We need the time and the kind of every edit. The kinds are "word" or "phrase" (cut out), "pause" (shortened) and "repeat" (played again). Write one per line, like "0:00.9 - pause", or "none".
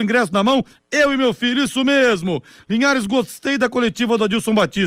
none